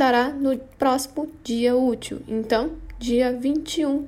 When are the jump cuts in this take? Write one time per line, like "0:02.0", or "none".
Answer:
none